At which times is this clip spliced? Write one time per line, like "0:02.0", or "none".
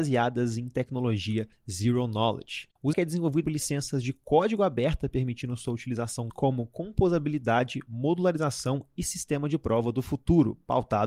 0:02.9
0:03.4
0:06.3